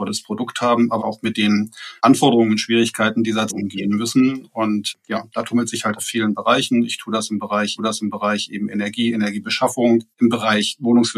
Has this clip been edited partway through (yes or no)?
yes